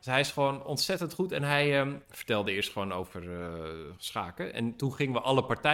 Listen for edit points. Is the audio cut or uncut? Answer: uncut